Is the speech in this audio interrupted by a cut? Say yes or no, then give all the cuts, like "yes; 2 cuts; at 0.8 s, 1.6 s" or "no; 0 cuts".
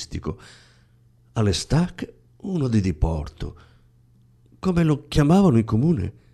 no; 0 cuts